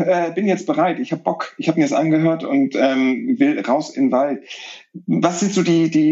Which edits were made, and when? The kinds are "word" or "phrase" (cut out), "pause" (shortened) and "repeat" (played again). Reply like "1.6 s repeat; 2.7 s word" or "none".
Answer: none